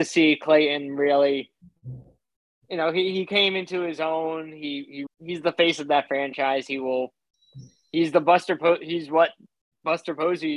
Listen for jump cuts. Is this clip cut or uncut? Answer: cut